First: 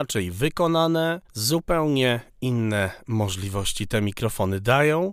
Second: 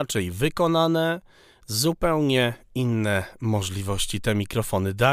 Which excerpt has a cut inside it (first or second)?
first